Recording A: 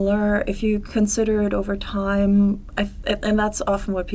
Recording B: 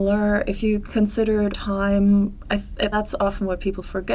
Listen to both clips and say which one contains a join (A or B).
B